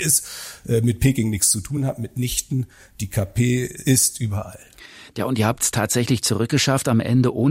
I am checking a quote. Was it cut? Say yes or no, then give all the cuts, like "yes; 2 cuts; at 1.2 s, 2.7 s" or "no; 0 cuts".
no; 0 cuts